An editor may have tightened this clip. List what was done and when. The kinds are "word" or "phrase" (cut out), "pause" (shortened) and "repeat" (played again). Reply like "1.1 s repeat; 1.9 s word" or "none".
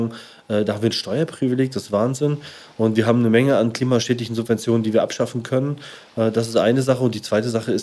none